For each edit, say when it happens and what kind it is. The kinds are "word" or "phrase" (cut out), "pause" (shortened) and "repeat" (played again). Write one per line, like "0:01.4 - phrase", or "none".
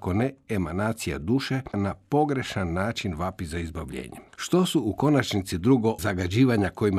0:01.7 - word
0:04.3 - pause
0:06.0 - word